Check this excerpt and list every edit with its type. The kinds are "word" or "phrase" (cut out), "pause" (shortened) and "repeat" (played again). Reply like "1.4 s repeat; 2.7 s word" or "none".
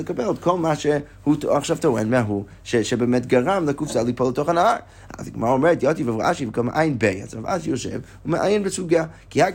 none